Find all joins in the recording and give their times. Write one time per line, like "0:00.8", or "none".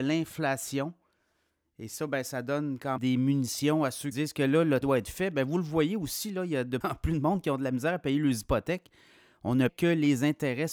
0:03.0
0:04.1
0:04.8
0:06.8
0:09.7